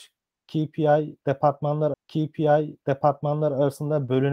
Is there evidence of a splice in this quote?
yes; 1 cut; at 1.9 s

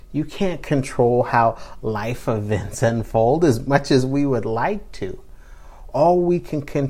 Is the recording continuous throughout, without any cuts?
yes; 0 cuts

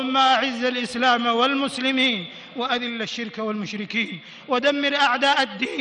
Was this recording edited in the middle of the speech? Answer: no; 0 cuts

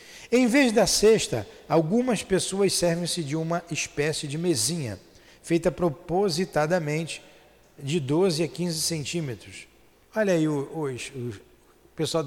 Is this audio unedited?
yes; 0 cuts

